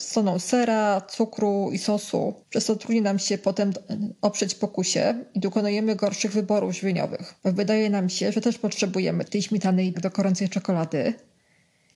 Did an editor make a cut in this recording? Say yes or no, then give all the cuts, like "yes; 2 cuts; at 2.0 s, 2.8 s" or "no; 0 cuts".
yes; 4 cuts; at 2.4 s, 7.4 s, 9.3 s, 9.9 s